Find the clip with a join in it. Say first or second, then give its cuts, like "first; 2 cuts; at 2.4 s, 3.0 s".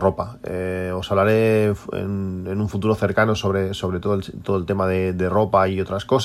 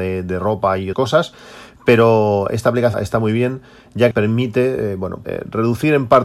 second; 4 cuts; at 0.9 s, 2.9 s, 4.1 s, 5.2 s